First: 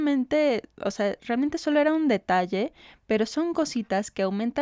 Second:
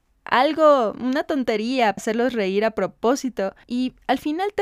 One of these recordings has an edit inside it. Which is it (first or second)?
second